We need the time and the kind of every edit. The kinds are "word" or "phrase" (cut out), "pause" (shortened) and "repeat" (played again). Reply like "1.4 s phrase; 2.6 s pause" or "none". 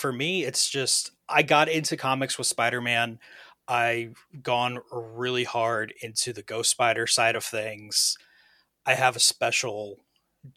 none